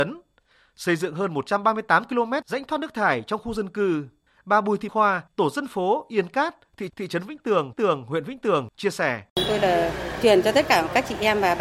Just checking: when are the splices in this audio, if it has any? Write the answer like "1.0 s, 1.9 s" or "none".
4.9 s, 5.3 s, 6.9 s, 7.7 s, 9.3 s, 10.2 s